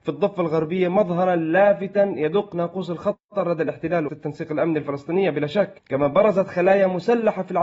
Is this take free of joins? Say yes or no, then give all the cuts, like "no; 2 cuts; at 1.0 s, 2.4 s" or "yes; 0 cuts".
no; 1 cut; at 4.1 s